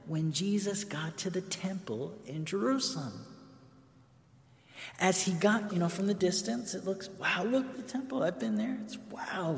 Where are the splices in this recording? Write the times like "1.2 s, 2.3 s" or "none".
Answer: 5.7 s, 7.7 s